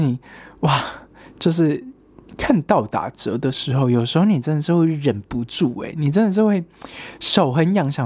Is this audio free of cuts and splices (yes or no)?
yes